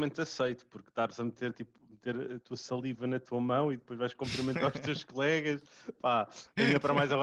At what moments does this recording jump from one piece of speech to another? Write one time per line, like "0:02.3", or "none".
none